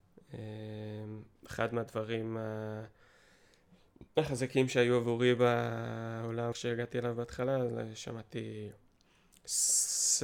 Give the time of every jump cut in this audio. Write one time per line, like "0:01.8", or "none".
0:01.4
0:04.1
0:06.5